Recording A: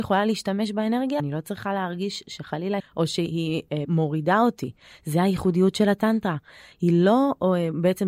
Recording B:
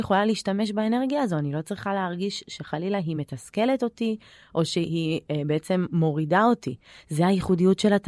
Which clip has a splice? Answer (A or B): A